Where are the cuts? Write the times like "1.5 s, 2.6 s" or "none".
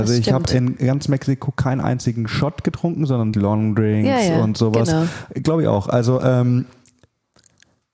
3.3 s